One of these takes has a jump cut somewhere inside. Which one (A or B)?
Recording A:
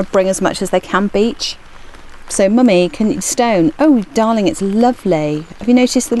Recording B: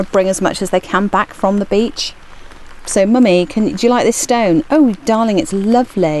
A